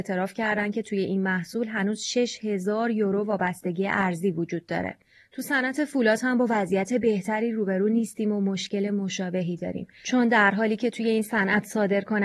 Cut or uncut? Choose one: uncut